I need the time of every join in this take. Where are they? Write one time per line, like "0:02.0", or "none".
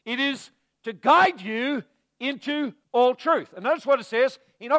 0:02.8